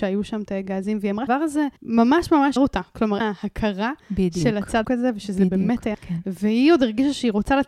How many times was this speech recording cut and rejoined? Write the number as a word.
six